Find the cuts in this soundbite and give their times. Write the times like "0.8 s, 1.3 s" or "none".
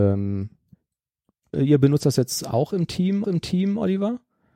1.5 s, 3.2 s